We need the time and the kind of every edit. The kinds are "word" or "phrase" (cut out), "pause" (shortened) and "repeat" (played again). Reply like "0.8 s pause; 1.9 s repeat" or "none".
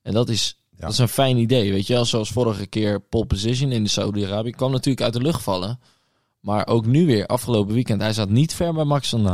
none